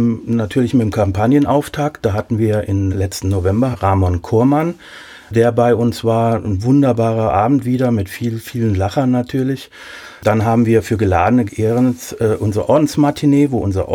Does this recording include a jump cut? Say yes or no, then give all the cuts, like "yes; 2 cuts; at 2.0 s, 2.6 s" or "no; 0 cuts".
yes; 3 cuts; at 2.9 s, 3.7 s, 11.5 s